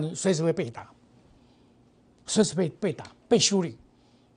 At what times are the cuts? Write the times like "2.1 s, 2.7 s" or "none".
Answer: none